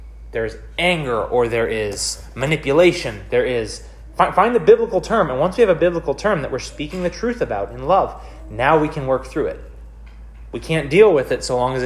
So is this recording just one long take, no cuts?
yes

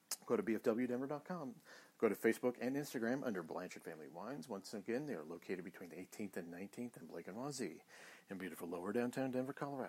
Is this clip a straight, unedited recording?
no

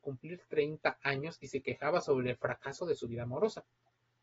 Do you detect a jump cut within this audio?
no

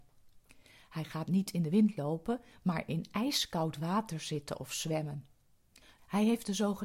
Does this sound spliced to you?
no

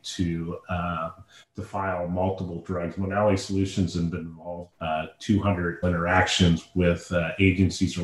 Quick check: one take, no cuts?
no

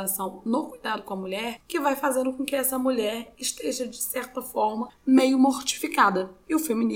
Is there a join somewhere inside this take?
no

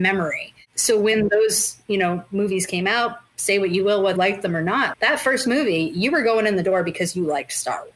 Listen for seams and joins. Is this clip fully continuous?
no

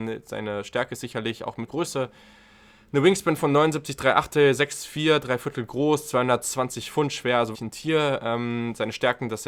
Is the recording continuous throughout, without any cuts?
no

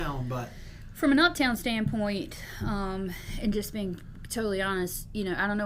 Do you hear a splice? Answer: no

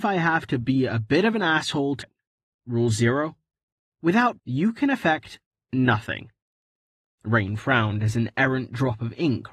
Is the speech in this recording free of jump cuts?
no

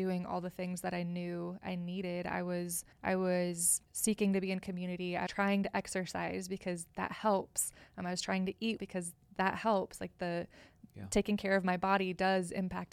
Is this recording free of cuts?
no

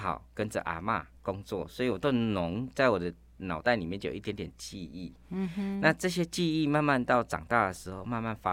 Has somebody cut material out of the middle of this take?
yes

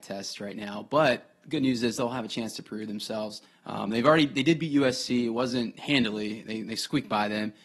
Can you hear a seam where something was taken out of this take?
yes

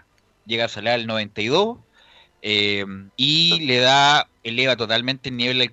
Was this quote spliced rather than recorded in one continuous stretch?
yes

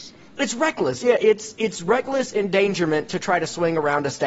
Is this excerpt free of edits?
yes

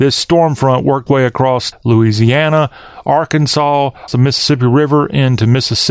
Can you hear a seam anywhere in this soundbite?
yes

